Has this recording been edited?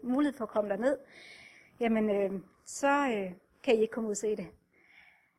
no; 0 cuts

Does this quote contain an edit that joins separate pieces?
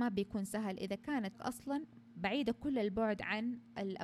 yes; 1 cut; at 1.3 s

